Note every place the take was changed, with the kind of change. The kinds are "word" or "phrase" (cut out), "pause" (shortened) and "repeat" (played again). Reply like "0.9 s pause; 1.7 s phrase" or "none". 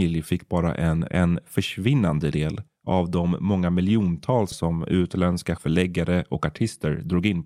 1.1 s word; 2.3 s word; 4.5 s word; 5.6 s word